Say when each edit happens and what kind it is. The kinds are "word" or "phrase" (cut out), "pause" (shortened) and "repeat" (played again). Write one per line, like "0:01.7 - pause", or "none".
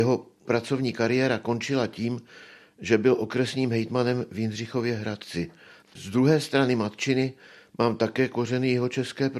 none